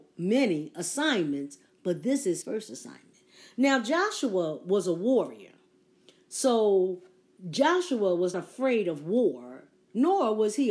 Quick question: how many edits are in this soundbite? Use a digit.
2